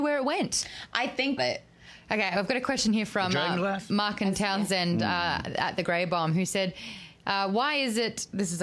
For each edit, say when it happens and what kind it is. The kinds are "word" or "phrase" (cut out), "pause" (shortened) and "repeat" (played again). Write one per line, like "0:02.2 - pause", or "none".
0:01.4 - phrase